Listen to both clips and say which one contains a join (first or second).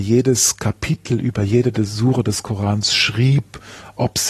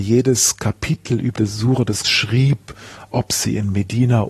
second